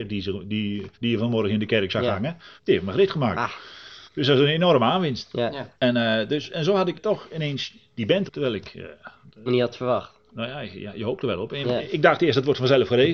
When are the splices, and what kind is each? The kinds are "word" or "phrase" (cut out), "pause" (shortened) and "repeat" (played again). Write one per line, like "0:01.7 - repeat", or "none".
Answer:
0:00.9 - pause
0:02.6 - pause
0:04.1 - pause
0:05.8 - pause
0:06.9 - word
0:08.3 - word
0:09.5 - word
0:10.2 - pause